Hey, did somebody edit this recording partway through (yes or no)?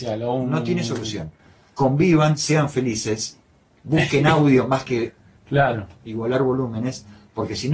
no